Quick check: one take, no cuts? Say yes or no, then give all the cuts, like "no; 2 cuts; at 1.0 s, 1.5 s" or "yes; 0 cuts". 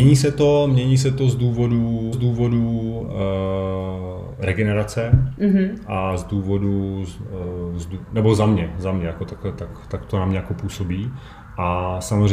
no; 1 cut; at 2.1 s